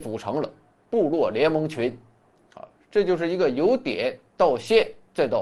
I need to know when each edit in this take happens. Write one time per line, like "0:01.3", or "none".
none